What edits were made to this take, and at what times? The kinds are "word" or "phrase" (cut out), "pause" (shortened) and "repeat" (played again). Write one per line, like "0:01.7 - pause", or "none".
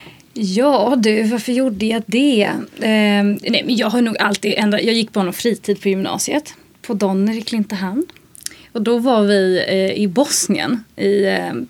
none